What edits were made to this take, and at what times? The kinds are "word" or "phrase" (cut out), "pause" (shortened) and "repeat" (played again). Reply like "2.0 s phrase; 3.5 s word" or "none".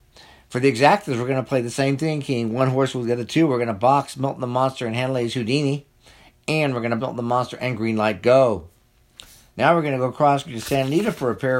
7.0 s word; 10.4 s word